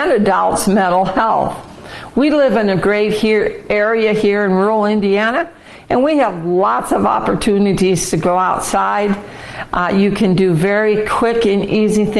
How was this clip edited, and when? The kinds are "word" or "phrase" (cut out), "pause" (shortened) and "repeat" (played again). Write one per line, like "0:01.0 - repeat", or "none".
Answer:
none

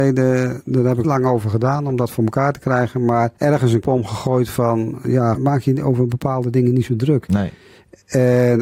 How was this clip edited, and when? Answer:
0:01.0 - word
0:03.4 - pause
0:03.8 - word
0:05.3 - word

